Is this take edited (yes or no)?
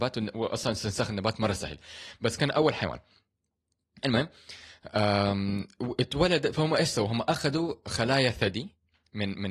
no